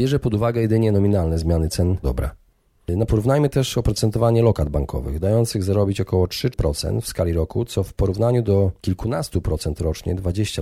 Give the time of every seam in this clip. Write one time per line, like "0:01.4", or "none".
0:02.0
0:03.1